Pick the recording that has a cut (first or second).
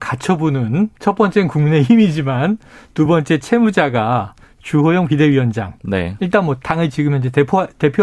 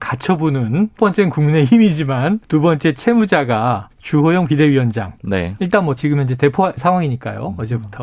second